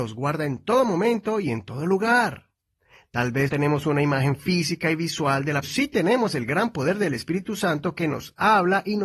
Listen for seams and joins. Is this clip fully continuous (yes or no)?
no